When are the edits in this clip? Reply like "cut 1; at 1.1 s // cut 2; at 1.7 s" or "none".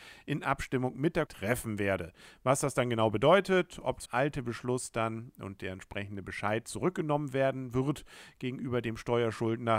cut 1; at 1.3 s // cut 2; at 4.1 s